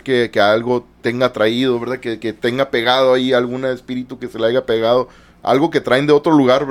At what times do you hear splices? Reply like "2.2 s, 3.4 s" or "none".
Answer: none

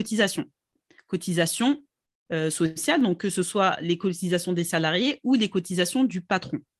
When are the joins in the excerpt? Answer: none

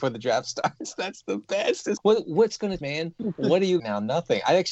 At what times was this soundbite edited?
2.0 s, 2.8 s, 3.8 s

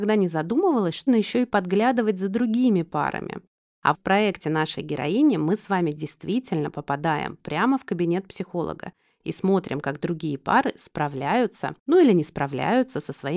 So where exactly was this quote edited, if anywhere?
1.1 s, 3.9 s

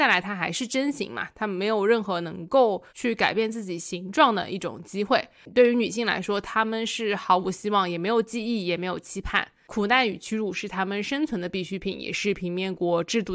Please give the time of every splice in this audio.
2.9 s

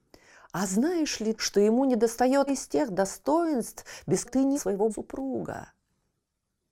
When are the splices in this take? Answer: 1.4 s, 2.5 s, 4.2 s, 4.5 s, 4.9 s

